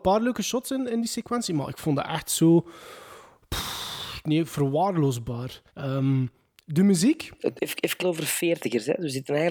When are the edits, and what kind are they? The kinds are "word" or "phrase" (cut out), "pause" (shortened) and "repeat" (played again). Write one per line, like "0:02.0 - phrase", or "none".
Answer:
0:05.7 - pause
0:07.6 - word
0:08.0 - phrase